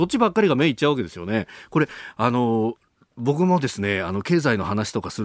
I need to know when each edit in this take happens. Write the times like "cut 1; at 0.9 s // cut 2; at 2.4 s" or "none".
none